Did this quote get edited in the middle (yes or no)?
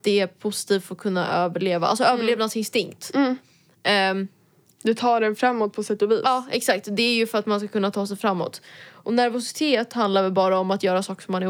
no